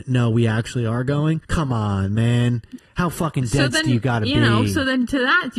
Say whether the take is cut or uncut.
cut